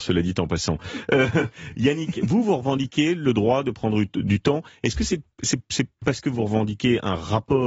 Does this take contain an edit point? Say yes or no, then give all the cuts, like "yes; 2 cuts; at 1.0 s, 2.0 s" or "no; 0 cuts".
no; 0 cuts